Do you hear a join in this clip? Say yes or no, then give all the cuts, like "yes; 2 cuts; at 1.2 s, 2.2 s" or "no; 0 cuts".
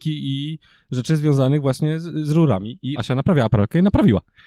yes; 1 cut; at 3.0 s